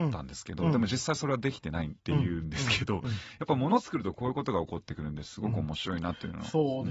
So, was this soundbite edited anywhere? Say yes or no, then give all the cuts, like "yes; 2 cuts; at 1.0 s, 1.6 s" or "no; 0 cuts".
yes; 1 cut; at 2.0 s